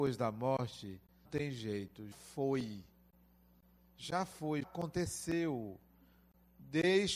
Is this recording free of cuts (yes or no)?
no